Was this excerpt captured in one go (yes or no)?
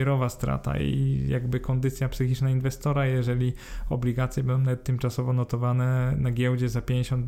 yes